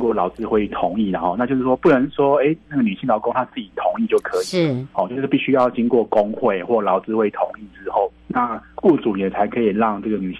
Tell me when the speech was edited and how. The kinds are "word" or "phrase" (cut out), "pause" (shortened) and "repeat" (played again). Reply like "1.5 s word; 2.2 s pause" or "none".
4.9 s pause